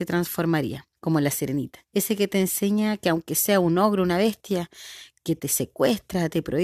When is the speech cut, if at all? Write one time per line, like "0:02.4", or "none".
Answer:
0:01.0
0:01.9